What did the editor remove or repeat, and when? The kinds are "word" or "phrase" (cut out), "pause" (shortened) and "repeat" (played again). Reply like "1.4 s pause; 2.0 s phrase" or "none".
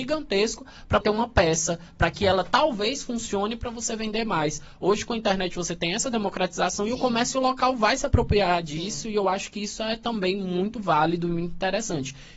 1.0 s word